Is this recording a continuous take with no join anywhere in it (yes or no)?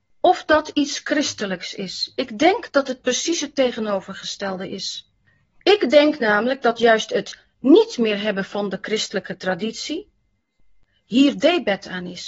yes